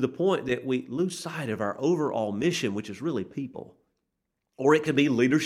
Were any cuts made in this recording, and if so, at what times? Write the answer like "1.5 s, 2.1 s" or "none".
none